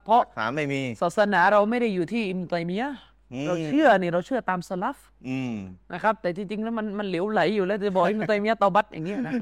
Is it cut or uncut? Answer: cut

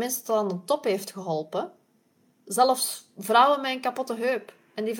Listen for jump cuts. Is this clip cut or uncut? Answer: uncut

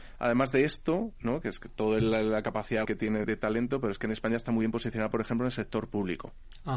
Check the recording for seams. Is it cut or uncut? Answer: cut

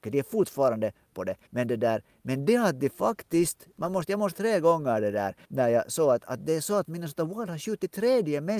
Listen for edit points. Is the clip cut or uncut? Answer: cut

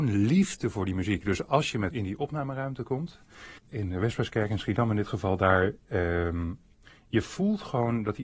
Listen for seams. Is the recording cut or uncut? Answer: cut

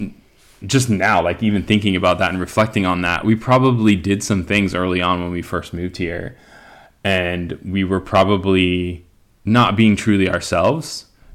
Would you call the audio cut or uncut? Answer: uncut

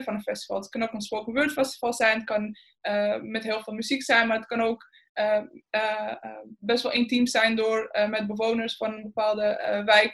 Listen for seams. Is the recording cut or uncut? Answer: uncut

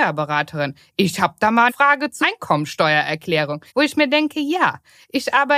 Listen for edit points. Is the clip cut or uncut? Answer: cut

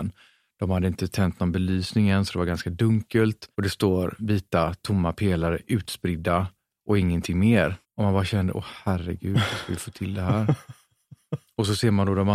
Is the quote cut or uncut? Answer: cut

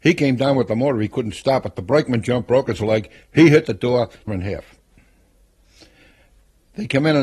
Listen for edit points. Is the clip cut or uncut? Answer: cut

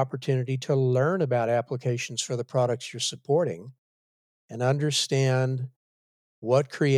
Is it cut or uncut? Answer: uncut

